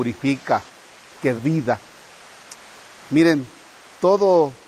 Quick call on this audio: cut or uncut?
cut